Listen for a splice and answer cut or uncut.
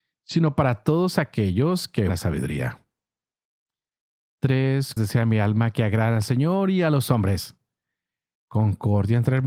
cut